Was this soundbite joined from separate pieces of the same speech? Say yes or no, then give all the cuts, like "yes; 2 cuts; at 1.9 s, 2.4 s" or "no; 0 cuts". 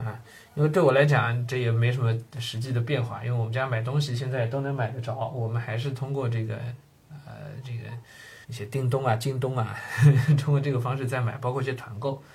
yes; 1 cut; at 8.4 s